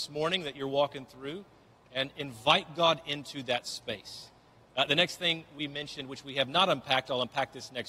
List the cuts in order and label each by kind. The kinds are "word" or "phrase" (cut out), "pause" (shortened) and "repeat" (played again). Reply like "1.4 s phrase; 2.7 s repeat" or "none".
none